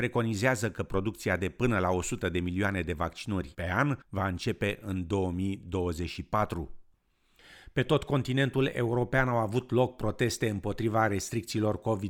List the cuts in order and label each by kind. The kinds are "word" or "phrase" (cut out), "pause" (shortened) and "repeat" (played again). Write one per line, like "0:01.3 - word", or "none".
0:04.0 - pause